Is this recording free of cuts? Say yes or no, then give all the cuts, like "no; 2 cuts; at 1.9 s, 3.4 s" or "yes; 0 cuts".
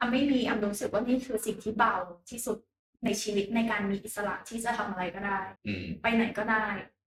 no; 1 cut; at 5.6 s